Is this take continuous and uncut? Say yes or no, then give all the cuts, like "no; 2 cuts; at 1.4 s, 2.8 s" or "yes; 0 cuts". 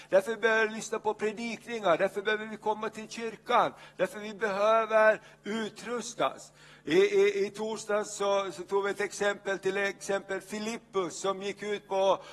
yes; 0 cuts